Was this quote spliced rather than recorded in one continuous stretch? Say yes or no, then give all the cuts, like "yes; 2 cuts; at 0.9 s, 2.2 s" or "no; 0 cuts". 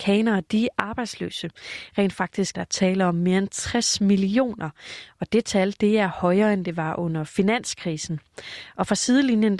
yes; 1 cut; at 2.5 s